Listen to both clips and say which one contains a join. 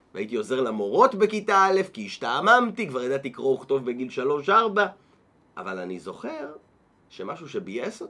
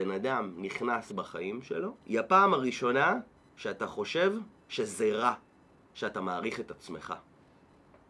second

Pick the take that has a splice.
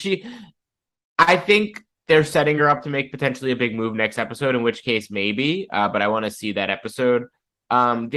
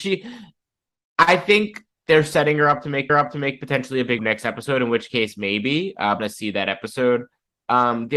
second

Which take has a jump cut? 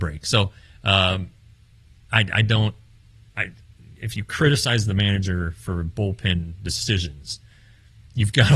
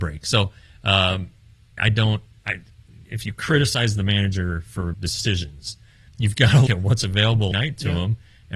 second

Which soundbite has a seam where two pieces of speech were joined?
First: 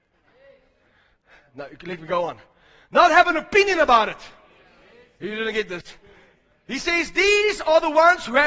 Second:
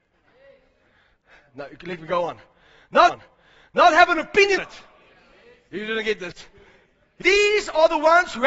second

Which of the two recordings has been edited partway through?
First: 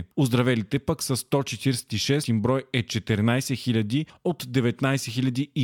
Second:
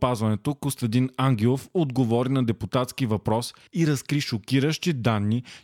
first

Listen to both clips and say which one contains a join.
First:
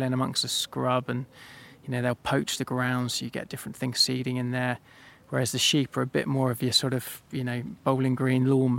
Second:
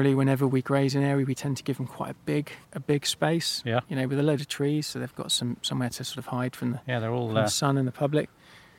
second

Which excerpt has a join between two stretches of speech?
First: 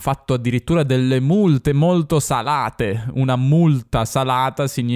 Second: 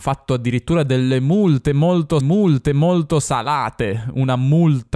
second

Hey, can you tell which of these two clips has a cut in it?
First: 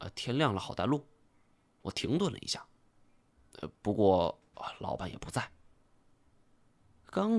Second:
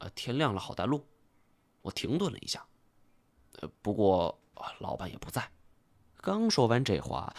second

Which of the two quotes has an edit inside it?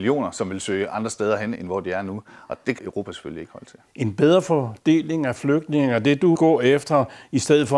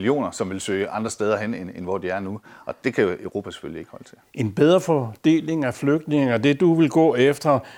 first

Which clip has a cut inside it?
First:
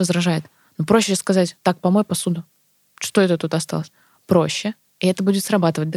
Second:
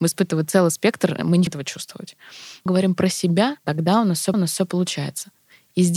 second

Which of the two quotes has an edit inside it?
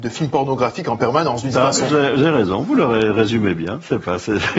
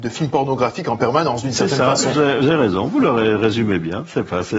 first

